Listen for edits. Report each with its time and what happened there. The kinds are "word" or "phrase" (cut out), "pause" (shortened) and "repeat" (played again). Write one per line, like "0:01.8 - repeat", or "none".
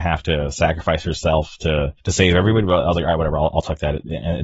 0:02.0 - pause

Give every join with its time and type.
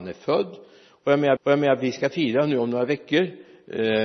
0:01.4 - repeat

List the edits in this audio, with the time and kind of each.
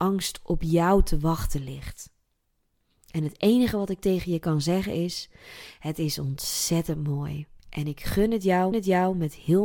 0:07.6 - pause
0:08.7 - repeat

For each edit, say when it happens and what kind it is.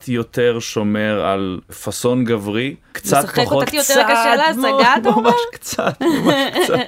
0:03.7 - word

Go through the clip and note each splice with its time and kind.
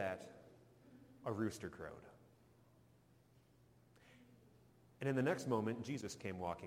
none

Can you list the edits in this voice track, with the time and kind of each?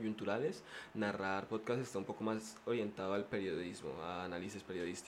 none

